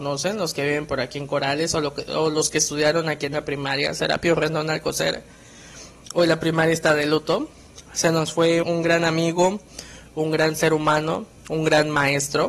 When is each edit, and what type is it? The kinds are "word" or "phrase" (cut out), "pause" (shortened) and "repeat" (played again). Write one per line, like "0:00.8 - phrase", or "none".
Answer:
0:07.9 - pause
0:08.6 - word

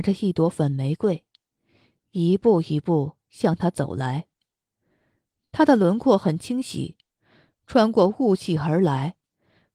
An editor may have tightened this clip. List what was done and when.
none

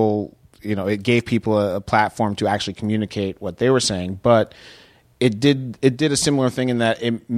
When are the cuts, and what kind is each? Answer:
none

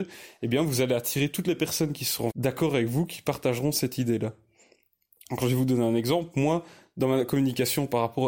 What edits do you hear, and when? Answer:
0:02.3 - word

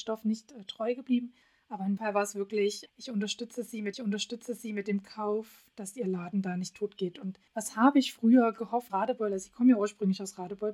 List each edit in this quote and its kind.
0:01.4 - pause
0:02.0 - word
0:02.9 - word
0:03.9 - repeat
0:07.5 - pause
0:08.9 - phrase

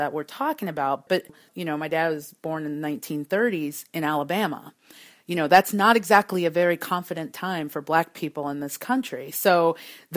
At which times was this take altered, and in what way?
none

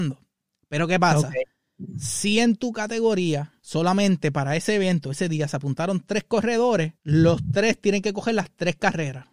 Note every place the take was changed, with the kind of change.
0:03.6 - pause
0:07.0 - pause

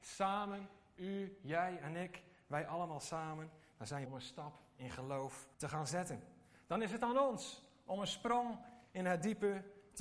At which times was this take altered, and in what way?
0:04.1 - phrase
0:05.5 - pause

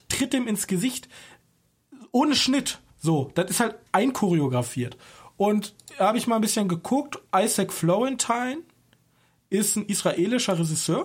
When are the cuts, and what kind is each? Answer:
0:02.9 - pause
0:03.9 - pause
0:07.3 - pause

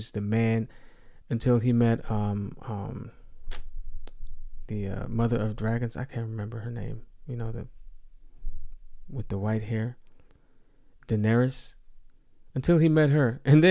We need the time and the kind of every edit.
none

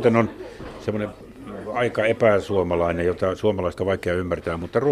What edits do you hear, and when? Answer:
0:03.8 - word

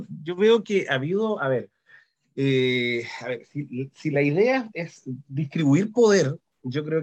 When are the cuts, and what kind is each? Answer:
none

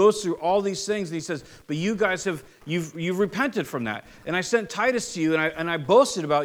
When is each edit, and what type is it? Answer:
none

